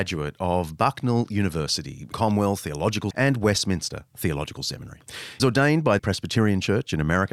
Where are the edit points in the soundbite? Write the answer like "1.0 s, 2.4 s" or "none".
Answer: 2.1 s, 3.1 s, 5.4 s, 6.0 s